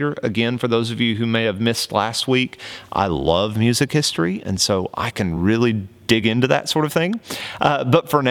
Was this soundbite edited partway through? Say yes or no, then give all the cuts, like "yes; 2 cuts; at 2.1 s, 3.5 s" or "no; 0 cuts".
no; 0 cuts